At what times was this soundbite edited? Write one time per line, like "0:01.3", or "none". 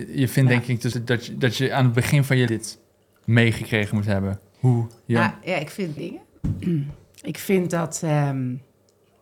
0:00.9
0:02.5
0:06.0